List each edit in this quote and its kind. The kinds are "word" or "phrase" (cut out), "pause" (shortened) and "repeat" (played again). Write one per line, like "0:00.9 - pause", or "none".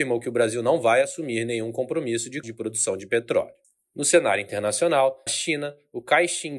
0:02.4 - word
0:03.6 - pause
0:05.3 - word